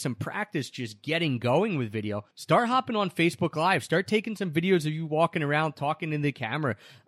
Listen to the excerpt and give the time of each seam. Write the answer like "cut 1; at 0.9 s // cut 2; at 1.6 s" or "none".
cut 1; at 2.3 s